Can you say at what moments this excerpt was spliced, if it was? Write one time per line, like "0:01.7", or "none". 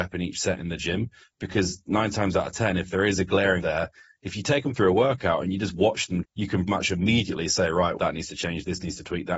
0:03.6
0:06.2
0:06.7
0:08.0